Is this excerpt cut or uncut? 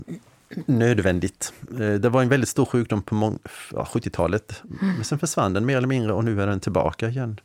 uncut